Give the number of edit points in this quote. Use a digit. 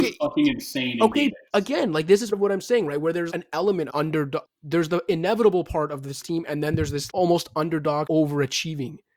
8